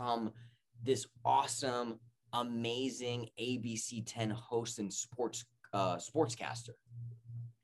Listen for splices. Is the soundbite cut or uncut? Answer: uncut